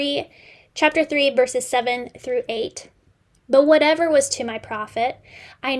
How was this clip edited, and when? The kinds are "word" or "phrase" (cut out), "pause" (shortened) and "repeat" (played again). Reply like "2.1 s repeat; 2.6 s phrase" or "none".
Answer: none